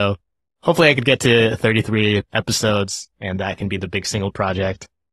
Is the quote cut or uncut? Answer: cut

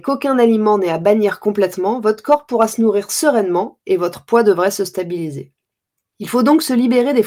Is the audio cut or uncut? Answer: uncut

